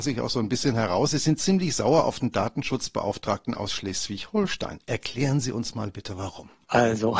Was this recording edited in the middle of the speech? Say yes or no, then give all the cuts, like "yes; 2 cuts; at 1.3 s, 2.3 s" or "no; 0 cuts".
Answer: no; 0 cuts